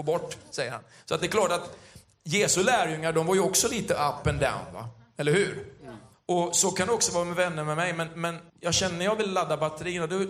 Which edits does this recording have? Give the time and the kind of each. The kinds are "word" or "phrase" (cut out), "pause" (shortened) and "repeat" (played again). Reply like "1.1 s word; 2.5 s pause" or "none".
6.1 s pause; 8.5 s pause